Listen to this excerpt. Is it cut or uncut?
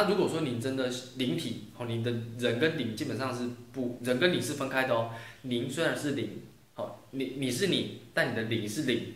uncut